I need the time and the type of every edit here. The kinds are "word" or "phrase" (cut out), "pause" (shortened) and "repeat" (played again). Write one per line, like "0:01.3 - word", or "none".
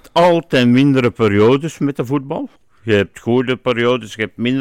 0:02.6 - pause